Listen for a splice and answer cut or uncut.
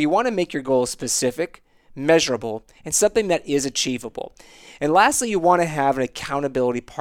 uncut